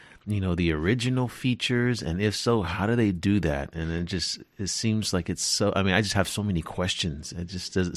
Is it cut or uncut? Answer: uncut